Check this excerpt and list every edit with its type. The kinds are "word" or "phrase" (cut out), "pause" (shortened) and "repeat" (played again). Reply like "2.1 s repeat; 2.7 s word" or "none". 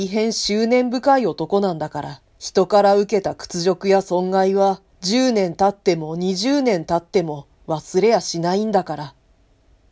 2.3 s pause; 4.9 s pause